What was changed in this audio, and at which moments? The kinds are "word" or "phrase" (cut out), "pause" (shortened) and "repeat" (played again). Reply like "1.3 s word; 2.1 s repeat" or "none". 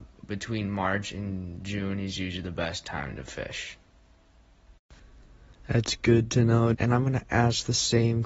6.7 s word